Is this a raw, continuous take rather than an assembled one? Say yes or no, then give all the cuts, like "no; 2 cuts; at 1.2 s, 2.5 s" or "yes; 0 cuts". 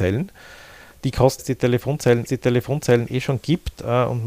no; 2 cuts; at 1.4 s, 2.3 s